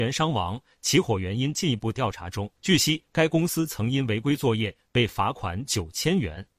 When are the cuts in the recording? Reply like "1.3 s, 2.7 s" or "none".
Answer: 2.6 s